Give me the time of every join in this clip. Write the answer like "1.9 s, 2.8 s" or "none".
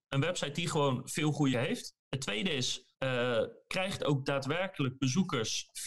1.5 s, 2.0 s, 2.9 s, 4.0 s